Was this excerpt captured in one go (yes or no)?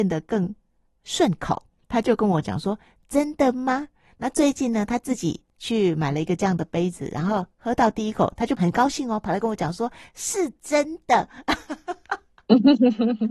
yes